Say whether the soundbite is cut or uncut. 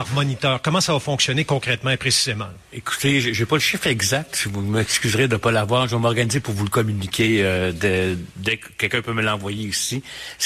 uncut